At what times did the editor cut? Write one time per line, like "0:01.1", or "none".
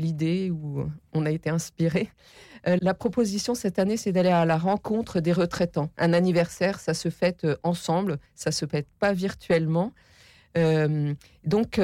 0:02.8
0:08.3